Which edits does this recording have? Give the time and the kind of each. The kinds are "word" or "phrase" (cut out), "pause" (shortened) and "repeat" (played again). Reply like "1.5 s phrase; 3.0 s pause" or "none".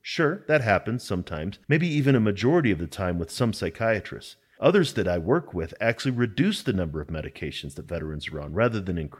1.6 s pause